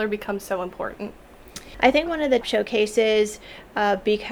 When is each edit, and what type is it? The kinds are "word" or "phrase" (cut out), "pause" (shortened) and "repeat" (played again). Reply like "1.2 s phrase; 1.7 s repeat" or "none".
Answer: 2.1 s word; 2.4 s word